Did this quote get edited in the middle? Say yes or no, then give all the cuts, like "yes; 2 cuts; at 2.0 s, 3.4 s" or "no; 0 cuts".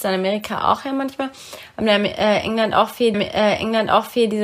yes; 1 cut; at 3.1 s